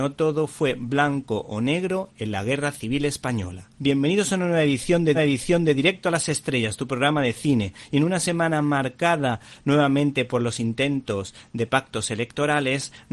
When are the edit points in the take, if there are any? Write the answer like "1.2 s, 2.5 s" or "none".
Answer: 3.7 s, 5.1 s

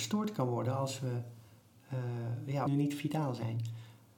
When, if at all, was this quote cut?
2.7 s

